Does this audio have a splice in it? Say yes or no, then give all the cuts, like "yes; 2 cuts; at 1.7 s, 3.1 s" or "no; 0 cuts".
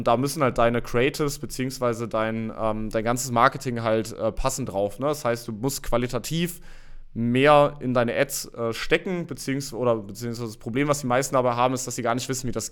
no; 0 cuts